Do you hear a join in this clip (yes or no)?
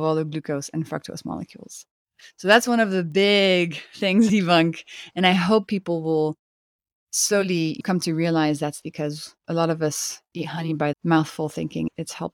yes